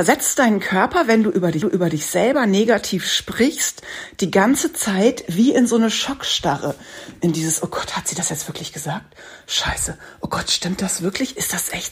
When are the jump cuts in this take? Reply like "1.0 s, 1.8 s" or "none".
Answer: 1.6 s

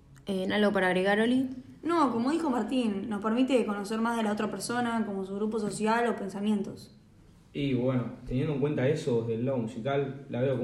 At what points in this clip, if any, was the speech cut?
none

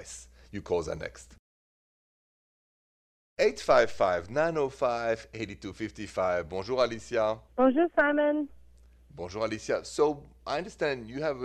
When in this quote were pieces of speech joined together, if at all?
7.5 s

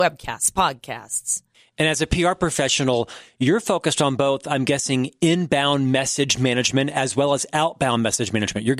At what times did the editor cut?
1.5 s

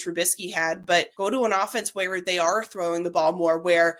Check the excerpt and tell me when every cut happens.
1.1 s

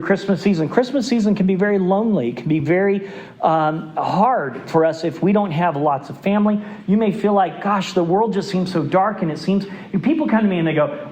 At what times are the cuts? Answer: none

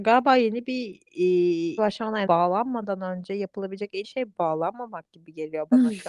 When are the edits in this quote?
1.8 s, 2.3 s, 4.0 s

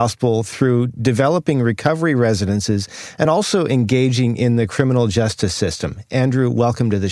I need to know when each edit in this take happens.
none

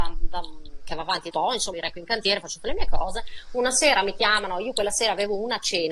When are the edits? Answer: 1.3 s, 1.7 s

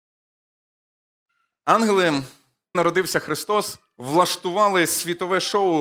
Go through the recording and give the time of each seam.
2.7 s

